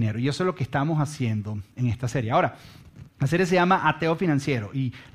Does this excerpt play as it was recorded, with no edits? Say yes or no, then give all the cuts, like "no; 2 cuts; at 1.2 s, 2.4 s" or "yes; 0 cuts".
no; 1 cut; at 3.1 s